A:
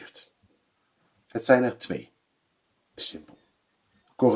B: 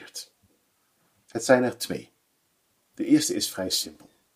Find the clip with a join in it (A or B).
A